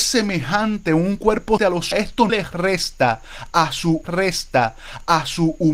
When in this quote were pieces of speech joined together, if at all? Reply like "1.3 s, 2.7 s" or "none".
1.6 s, 1.9 s, 2.3 s, 4.0 s